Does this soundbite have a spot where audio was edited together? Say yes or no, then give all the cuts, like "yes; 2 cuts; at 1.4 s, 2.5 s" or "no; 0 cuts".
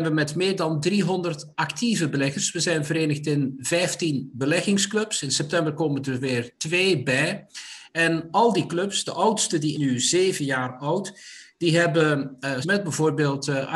yes; 2 cuts; at 9.7 s, 12.6 s